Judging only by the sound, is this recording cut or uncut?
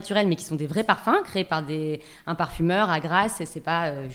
uncut